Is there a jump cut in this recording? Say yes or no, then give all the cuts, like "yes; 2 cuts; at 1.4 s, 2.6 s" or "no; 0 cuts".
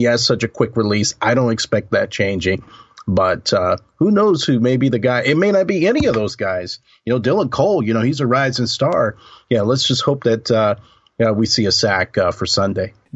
no; 0 cuts